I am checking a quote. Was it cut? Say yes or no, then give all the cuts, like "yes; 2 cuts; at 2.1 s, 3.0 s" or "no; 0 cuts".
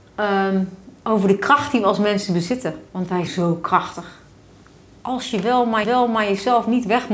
yes; 3 cuts; at 2.9 s, 3.3 s, 5.8 s